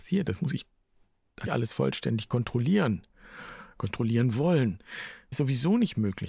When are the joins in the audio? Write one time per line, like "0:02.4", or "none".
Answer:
0:01.5
0:05.3